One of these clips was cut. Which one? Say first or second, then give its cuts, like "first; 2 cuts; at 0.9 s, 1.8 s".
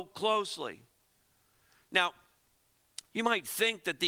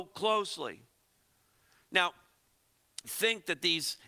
second; 1 cut; at 3.0 s